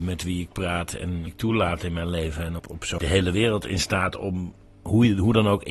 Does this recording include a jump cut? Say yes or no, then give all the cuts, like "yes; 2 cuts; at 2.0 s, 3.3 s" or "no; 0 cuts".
yes; 3 cuts; at 1.3 s, 2.6 s, 3.0 s